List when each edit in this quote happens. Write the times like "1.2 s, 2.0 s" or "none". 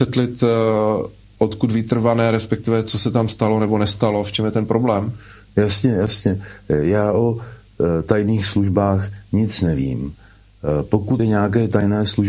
11.2 s